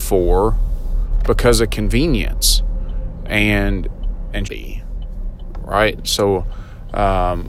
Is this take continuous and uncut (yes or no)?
no